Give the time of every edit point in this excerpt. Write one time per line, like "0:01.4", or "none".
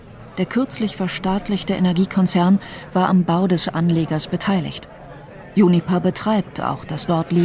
none